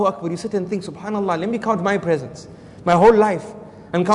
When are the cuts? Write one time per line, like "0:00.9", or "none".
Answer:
none